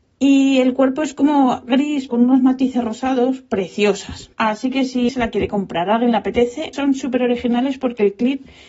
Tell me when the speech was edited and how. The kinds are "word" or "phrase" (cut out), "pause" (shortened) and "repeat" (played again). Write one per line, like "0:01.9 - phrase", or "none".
0:02.1 - word
0:04.3 - pause
0:05.1 - word
0:06.7 - word